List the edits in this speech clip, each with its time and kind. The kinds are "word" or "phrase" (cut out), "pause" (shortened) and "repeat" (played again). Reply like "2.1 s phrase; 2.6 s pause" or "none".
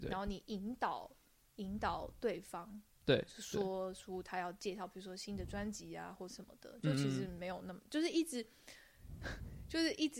none

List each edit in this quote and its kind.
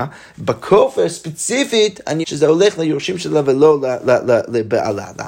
2.2 s word

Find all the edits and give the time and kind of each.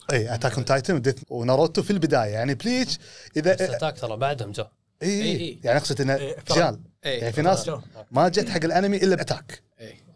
1.2 s word; 6.5 s word; 9.2 s word

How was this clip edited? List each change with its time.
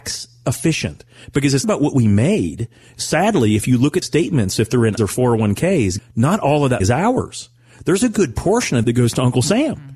1.6 s word; 4.0 s word; 5.0 s word; 6.0 s word; 6.8 s word; 8.8 s word

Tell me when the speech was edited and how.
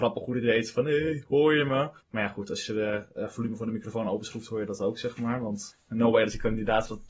2.0 s pause

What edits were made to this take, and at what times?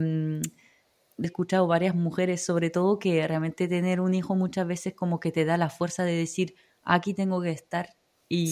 1.2 s phrase

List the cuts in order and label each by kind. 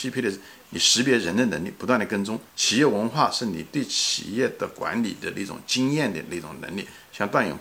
2.5 s pause

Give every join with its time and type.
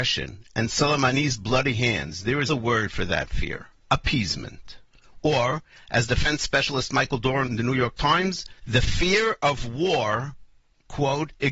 2.5 s word; 3.8 s pause; 7.5 s word; 8.6 s pause

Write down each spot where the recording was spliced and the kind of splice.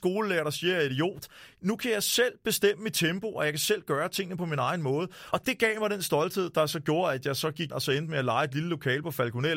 7.7 s word

